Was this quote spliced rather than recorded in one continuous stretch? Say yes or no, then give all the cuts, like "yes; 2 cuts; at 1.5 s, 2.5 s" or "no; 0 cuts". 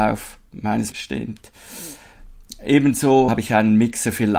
yes; 2 cuts; at 0.9 s, 3.3 s